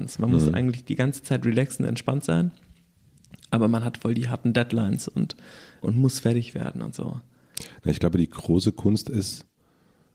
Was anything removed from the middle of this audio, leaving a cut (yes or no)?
yes